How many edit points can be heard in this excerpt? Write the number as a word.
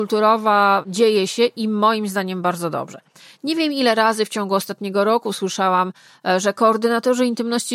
zero